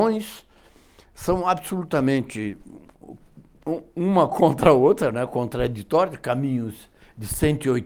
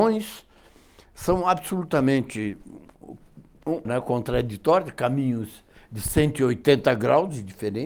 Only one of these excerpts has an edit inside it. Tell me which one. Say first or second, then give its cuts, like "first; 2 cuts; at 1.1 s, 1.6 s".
second; 1 cut; at 3.8 s